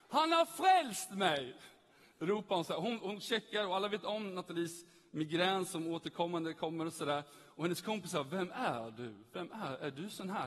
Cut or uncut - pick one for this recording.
uncut